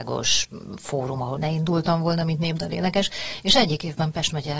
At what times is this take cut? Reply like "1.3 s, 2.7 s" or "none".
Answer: 1.4 s